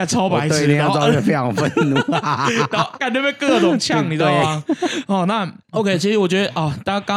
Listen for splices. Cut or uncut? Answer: cut